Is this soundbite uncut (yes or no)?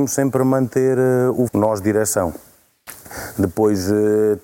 no